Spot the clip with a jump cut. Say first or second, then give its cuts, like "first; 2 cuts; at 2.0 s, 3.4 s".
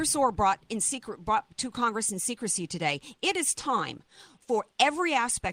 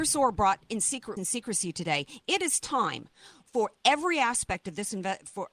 second; 1 cut; at 1.2 s